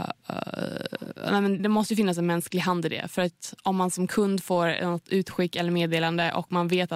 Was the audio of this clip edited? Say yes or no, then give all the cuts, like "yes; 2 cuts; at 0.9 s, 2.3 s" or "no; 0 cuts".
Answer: yes; 1 cut; at 1.6 s